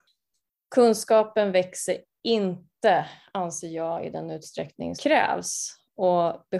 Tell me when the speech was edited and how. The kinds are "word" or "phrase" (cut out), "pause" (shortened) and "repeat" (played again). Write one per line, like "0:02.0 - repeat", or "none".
0:05.0 - word